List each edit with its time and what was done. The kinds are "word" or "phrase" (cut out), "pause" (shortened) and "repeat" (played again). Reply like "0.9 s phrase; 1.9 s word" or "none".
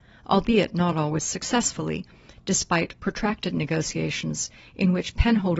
none